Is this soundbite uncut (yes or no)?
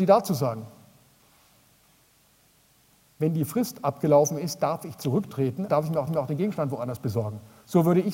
no